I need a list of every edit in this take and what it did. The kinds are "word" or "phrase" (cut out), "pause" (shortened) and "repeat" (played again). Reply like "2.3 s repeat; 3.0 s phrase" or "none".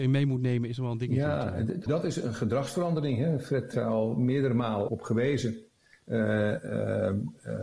1.9 s word; 3.7 s word; 4.9 s word